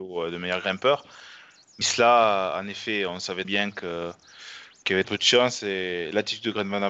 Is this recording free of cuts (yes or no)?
no